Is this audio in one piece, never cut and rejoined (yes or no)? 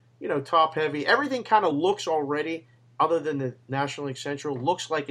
yes